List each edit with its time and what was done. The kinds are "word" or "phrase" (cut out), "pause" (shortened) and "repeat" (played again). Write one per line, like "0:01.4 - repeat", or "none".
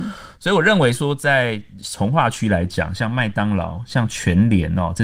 none